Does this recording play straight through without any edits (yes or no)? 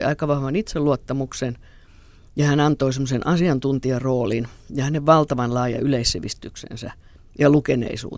yes